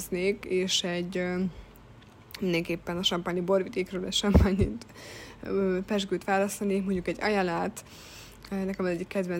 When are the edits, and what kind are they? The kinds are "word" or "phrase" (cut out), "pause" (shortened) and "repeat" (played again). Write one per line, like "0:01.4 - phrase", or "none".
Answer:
none